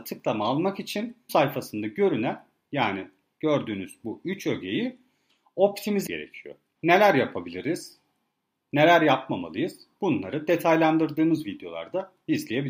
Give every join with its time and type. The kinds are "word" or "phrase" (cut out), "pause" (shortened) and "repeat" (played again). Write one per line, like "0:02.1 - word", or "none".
0:01.3 - word
0:06.1 - word